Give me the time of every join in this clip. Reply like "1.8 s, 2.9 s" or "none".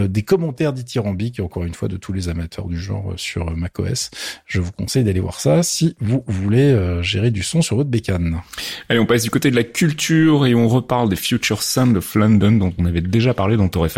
none